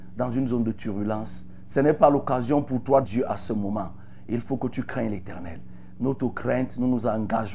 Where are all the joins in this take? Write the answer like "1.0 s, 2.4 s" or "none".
3.0 s